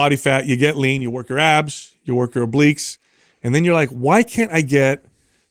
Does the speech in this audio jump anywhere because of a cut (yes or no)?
no